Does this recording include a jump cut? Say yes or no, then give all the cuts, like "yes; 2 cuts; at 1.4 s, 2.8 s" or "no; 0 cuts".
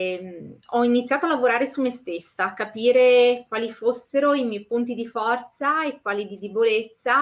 no; 0 cuts